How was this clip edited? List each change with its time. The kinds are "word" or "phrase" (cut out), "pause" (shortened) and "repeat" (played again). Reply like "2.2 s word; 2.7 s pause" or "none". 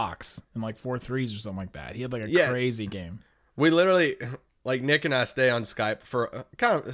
none